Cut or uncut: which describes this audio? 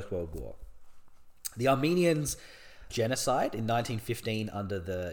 cut